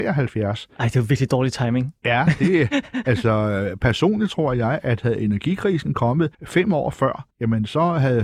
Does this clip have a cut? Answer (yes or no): yes